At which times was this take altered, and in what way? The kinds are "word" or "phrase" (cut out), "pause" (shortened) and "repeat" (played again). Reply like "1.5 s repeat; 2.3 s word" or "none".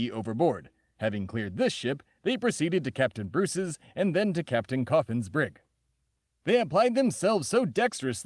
none